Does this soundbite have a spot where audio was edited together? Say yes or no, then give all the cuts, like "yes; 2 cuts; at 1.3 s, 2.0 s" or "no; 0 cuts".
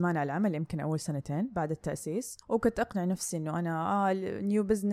yes; 1 cut; at 2.4 s